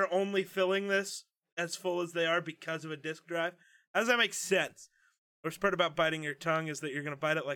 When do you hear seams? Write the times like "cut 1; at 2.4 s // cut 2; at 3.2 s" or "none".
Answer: none